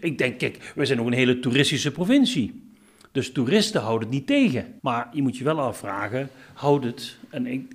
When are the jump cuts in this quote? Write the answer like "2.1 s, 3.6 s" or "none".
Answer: 4.8 s

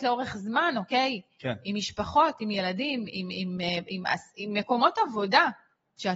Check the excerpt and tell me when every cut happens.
none

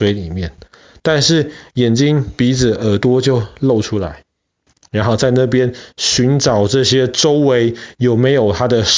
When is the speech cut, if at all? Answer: none

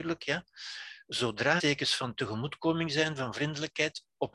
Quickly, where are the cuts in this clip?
1.6 s

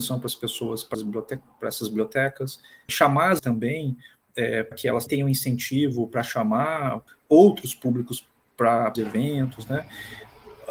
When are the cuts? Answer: 0.9 s, 2.9 s, 3.4 s, 4.7 s, 5.1 s, 7.1 s, 9.0 s

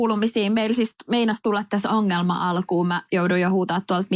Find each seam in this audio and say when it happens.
none

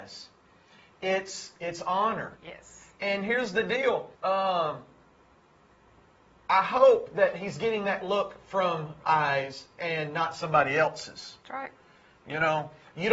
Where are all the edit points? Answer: 2.4 s, 4.1 s, 9.0 s

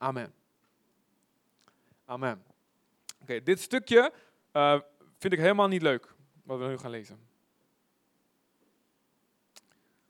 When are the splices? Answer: none

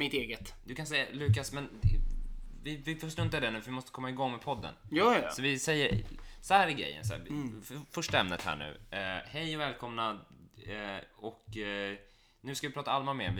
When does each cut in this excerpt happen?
none

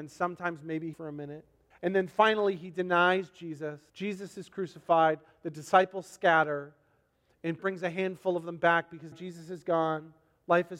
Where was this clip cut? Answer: 0.9 s, 1.7 s, 3.9 s, 7.6 s, 9.1 s

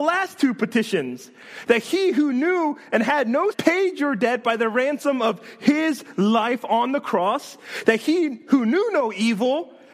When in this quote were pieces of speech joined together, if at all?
3.5 s

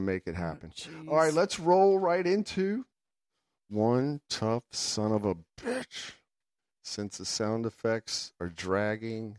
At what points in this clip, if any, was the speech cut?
none

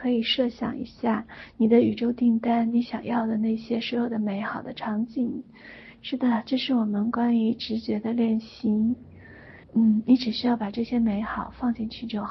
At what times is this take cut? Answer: 9.6 s

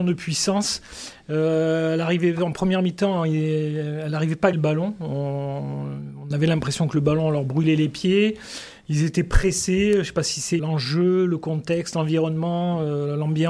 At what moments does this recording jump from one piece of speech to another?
4.5 s, 10.6 s

